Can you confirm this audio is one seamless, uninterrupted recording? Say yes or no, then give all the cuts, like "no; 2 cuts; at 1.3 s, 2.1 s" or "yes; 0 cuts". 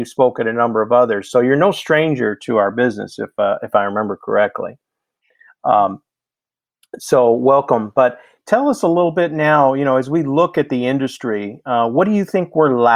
yes; 0 cuts